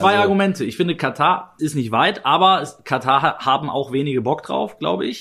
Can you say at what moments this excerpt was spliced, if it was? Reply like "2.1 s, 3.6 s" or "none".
1.6 s